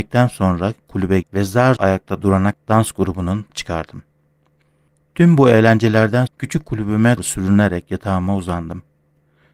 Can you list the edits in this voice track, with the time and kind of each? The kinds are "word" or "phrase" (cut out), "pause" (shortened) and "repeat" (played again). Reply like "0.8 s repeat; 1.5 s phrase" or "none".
1.2 s word; 1.8 s word; 2.5 s word; 3.5 s word; 6.3 s word; 7.2 s word